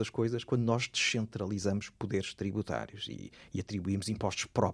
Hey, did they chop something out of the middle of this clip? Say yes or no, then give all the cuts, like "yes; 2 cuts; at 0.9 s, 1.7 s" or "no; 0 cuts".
no; 0 cuts